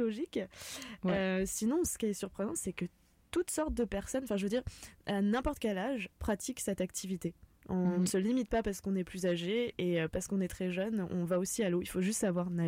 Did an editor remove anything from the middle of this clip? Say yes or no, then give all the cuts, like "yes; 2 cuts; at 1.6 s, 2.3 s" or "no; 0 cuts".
no; 0 cuts